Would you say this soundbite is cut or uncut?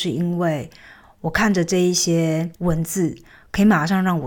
cut